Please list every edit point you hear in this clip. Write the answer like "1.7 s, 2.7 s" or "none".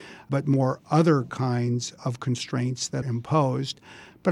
2.0 s, 3.0 s